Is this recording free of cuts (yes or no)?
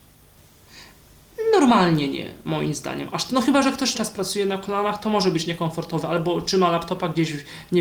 no